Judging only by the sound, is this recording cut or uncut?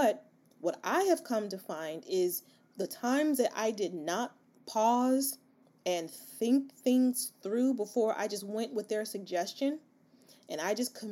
uncut